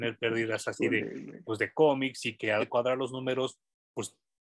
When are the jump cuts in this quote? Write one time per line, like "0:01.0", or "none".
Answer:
0:01.4
0:02.6